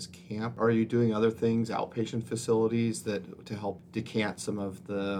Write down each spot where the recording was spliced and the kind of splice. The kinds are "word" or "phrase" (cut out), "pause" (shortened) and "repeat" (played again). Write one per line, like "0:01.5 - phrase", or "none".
none